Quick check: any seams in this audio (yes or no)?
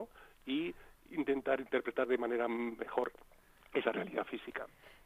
no